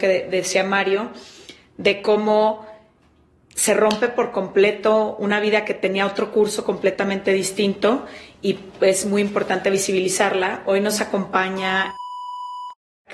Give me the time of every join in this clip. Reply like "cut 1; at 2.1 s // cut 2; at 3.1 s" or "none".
none